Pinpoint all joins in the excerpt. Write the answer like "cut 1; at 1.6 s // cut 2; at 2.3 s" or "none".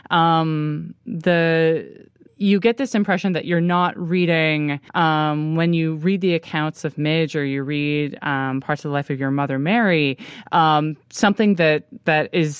cut 1; at 2.3 s // cut 2; at 4.9 s